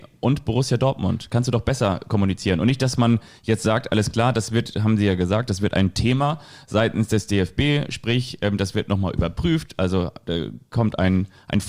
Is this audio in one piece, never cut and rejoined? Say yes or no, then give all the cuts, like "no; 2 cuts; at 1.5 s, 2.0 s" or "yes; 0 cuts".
yes; 0 cuts